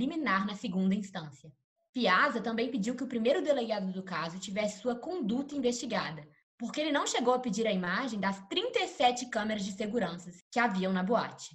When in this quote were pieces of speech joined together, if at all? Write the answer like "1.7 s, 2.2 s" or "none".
none